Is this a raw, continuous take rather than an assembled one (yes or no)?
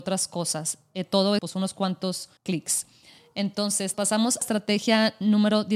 no